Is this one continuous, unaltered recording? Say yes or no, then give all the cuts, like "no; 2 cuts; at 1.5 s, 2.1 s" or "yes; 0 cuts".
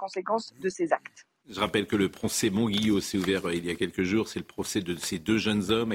yes; 0 cuts